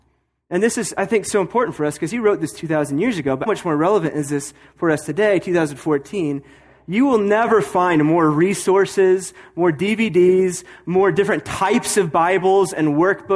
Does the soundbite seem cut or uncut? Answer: cut